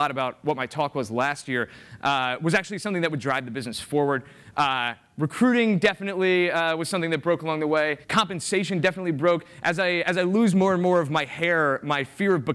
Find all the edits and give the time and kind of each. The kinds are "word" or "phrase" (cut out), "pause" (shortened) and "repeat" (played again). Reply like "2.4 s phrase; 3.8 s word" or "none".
8.0 s pause